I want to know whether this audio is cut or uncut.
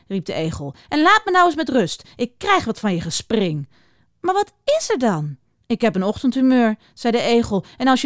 uncut